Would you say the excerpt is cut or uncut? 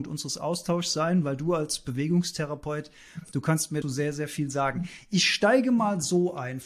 cut